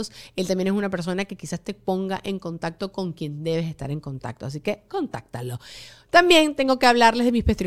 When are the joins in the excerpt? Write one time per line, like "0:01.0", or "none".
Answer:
none